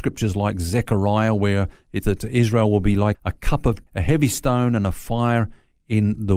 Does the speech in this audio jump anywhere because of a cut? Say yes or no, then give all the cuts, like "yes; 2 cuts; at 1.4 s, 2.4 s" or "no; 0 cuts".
yes; 3 cuts; at 2.0 s, 3.1 s, 3.9 s